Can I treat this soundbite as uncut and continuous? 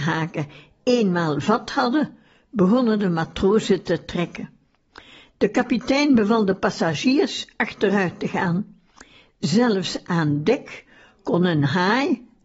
yes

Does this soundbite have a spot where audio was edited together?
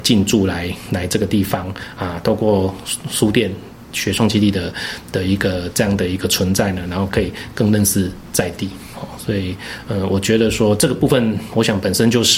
no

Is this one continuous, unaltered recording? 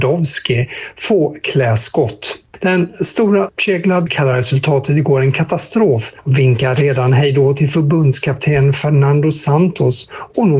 no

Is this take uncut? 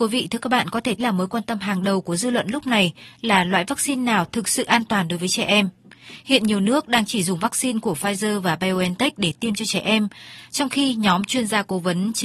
no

